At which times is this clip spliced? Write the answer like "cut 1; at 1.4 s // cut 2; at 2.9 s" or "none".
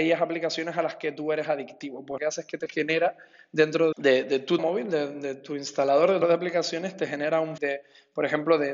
cut 1; at 2.2 s // cut 2; at 3.9 s // cut 3; at 4.6 s // cut 4; at 6.2 s // cut 5; at 7.6 s